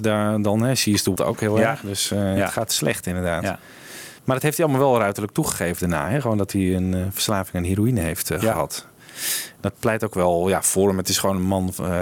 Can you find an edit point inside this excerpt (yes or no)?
yes